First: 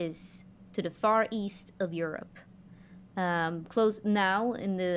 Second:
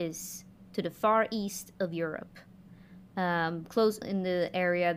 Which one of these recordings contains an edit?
second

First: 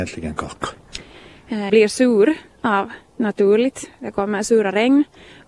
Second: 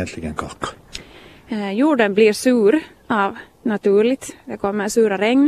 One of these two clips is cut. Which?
first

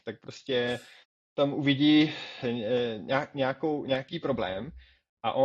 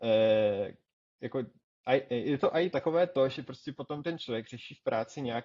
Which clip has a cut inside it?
first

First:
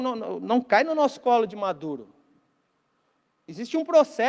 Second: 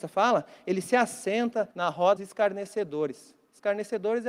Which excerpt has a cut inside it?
second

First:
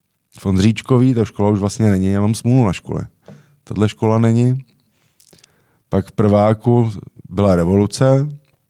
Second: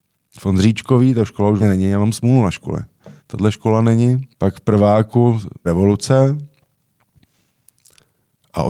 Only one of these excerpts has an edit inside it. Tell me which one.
second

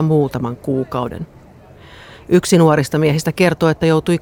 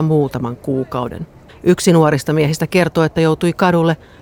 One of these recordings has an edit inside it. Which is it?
second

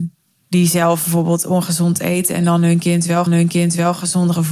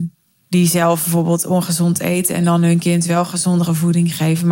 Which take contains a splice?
first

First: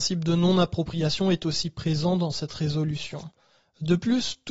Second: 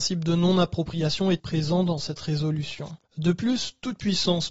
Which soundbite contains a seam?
second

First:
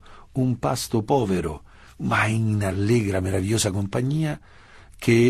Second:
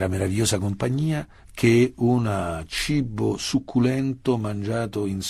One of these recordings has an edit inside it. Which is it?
second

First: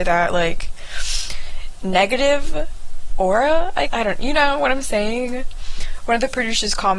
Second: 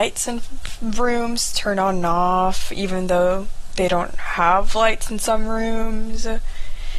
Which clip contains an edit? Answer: first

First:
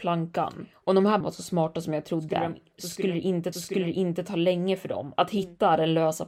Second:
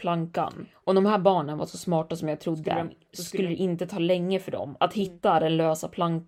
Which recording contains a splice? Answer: first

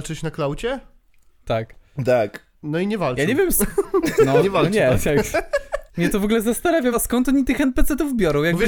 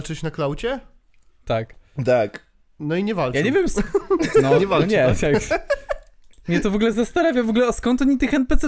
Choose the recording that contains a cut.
first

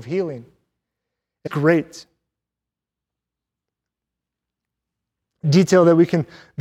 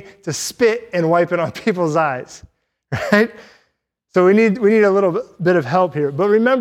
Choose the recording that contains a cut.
first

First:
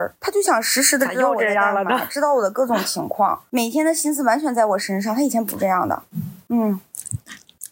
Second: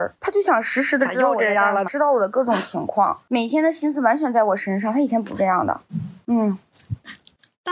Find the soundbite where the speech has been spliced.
second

